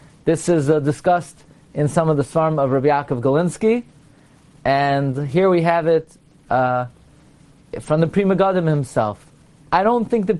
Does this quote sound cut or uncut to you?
uncut